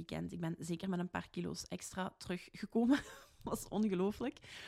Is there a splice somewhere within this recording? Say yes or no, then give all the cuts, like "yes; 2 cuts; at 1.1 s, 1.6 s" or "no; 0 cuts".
no; 0 cuts